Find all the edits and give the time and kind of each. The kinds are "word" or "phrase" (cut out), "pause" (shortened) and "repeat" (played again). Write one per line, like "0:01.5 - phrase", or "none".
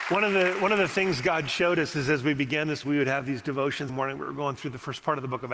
0:02.8 - word
0:03.9 - word